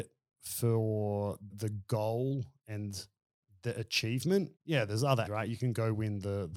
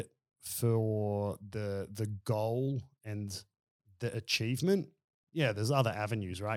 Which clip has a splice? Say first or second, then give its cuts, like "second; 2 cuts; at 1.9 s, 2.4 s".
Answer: first; 3 cuts; at 1.5 s, 4.6 s, 5.3 s